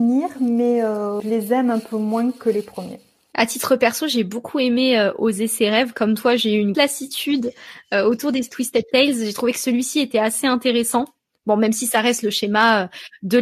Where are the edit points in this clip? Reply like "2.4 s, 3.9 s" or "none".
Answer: 6.7 s